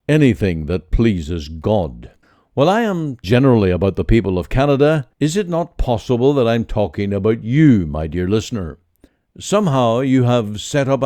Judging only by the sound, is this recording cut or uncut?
cut